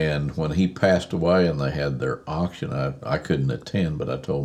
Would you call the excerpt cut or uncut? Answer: uncut